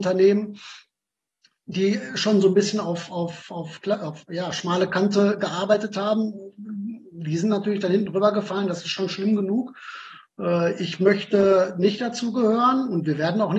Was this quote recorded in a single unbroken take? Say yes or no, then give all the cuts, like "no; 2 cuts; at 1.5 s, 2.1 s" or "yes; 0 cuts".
yes; 0 cuts